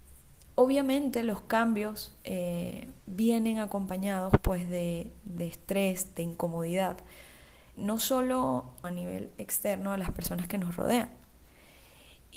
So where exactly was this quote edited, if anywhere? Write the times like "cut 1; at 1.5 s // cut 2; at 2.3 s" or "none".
cut 1; at 3.0 s // cut 2; at 7.7 s // cut 3; at 8.8 s